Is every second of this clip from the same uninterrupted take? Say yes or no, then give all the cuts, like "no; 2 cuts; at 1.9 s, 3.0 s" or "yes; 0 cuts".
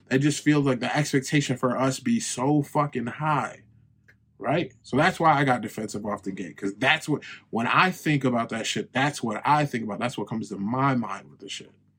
no; 1 cut; at 4.8 s